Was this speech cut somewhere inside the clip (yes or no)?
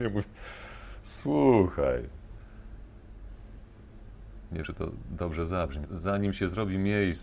yes